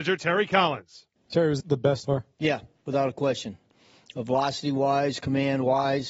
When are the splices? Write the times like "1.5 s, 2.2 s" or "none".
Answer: 1.2 s, 1.6 s, 2.0 s